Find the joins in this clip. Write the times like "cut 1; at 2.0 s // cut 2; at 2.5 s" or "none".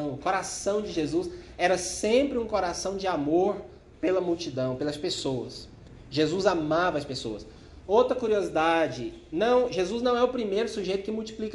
none

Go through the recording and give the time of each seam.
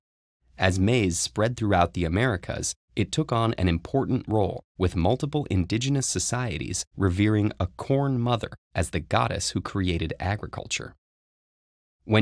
cut 1; at 4.7 s

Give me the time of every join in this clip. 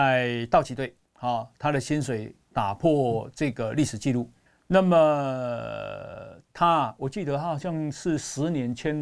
cut 1; at 1.1 s // cut 2; at 4.5 s

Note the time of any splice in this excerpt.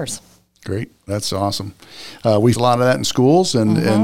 cut 1; at 2.6 s

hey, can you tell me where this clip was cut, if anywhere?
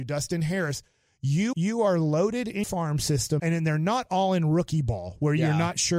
cut 1; at 1.5 s // cut 2; at 2.6 s // cut 3; at 3.4 s

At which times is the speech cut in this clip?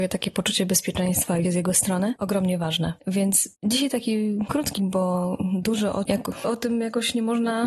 cut 1; at 1.4 s // cut 2; at 2.2 s // cut 3; at 3.5 s // cut 4; at 4.8 s // cut 5; at 6.1 s // cut 6; at 6.4 s

